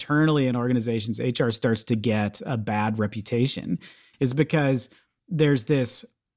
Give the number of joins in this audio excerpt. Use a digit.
0